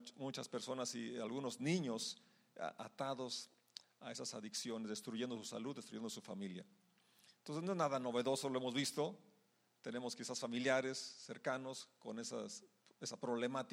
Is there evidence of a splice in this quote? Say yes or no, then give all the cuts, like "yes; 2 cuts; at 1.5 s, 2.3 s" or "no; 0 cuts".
no; 0 cuts